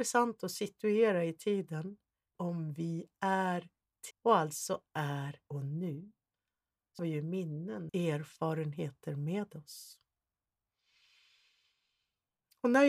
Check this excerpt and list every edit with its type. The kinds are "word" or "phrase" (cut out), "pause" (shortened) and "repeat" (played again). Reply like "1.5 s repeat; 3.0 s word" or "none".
2.3 s word; 4.1 s word; 5.5 s word; 7.0 s word; 7.9 s word

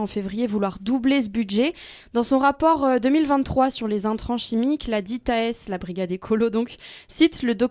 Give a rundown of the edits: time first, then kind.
none

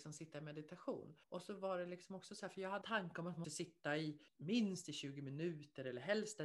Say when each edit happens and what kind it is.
1.2 s pause; 2.8 s word; 3.4 s word; 4.3 s pause

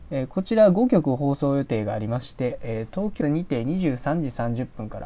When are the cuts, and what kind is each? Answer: 3.2 s word

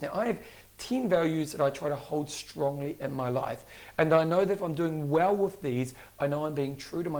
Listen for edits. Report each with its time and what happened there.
none

